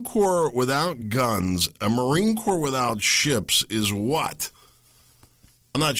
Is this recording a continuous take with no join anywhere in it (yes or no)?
yes